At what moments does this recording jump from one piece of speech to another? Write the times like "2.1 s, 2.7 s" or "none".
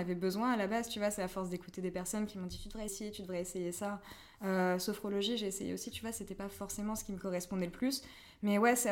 2.9 s